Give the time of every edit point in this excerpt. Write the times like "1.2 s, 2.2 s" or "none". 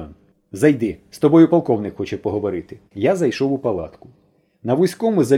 2.9 s